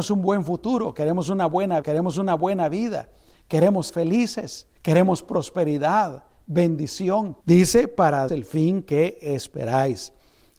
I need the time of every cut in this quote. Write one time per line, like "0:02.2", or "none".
0:01.8
0:03.9
0:04.8
0:07.4
0:08.3